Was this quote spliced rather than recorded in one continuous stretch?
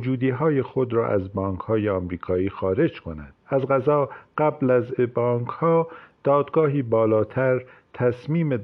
yes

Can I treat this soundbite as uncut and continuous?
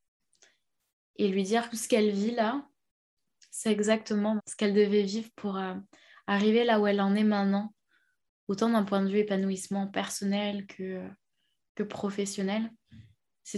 no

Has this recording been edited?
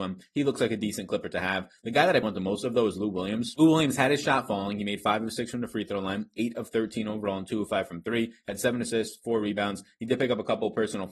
yes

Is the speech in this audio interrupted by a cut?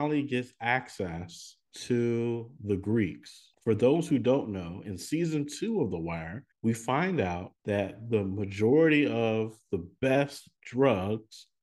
yes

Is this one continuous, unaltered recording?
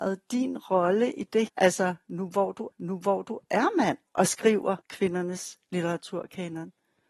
no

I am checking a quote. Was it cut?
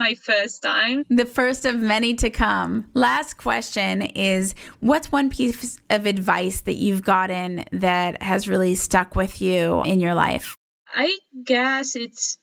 no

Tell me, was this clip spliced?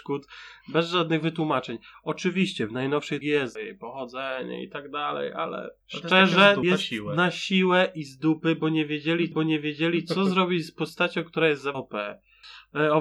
yes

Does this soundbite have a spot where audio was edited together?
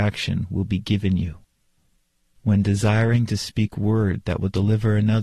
no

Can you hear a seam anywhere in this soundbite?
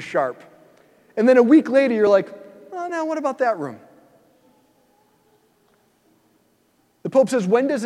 no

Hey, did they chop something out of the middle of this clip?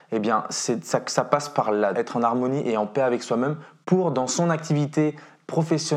yes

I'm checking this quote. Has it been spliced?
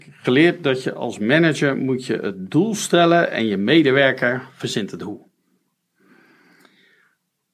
no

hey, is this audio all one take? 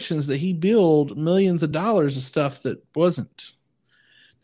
yes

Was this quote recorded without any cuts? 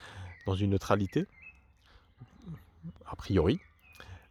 no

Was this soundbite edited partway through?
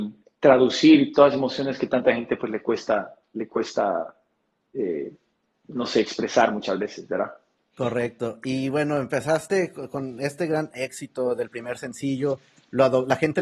no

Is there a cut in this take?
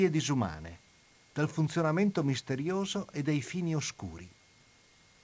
no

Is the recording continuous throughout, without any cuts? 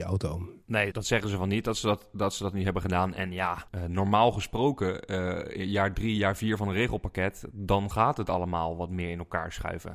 no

